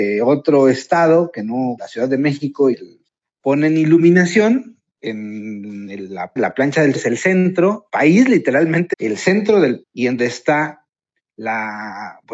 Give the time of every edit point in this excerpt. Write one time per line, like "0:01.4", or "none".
0:01.8
0:02.7
0:06.4
0:06.9
0:07.9
0:08.9
0:09.8
0:10.2

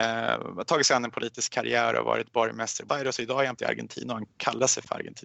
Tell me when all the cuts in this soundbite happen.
0:02.9
0:03.6

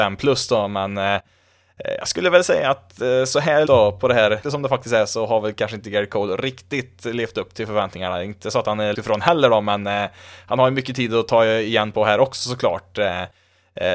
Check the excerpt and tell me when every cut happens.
0:03.7
0:04.4
0:08.9

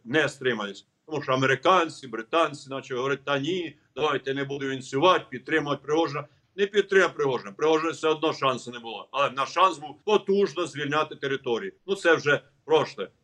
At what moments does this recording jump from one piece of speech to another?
0:10.0
0:11.8

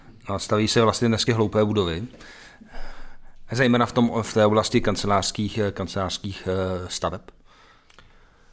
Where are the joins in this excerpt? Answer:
0:01.3

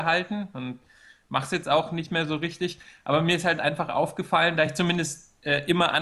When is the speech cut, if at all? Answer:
none

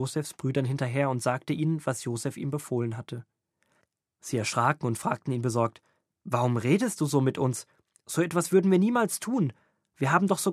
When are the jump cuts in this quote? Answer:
none

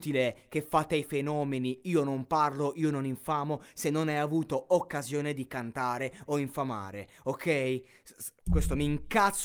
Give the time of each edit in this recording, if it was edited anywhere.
0:08.4

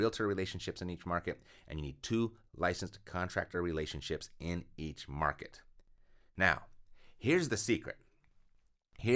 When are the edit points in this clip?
none

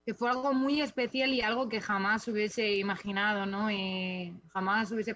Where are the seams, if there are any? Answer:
none

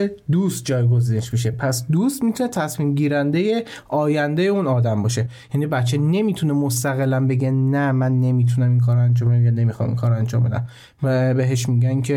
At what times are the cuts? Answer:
none

